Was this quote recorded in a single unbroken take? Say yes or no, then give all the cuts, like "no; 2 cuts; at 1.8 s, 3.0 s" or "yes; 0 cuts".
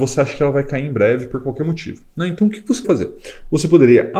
no; 1 cut; at 2.8 s